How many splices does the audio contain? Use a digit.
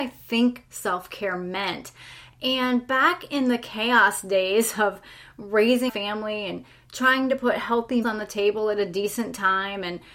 2